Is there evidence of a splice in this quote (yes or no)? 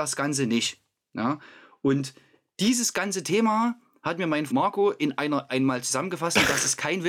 yes